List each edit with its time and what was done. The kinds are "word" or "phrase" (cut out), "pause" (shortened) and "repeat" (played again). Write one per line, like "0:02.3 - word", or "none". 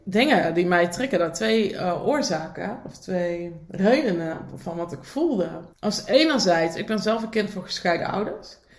0:05.7 - pause